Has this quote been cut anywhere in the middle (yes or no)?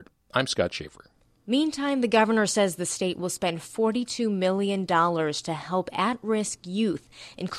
no